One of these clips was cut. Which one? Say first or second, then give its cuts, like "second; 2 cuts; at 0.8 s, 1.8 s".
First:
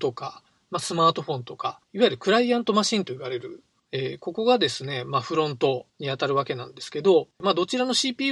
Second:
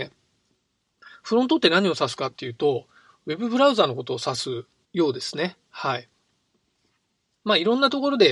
first; 4 cuts; at 1.8 s, 3.8 s, 5.9 s, 7.3 s